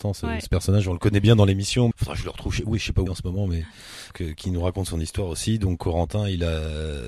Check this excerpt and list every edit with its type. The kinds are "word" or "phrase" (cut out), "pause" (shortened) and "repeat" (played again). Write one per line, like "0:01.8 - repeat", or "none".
0:01.9 - word
0:03.1 - word
0:04.1 - word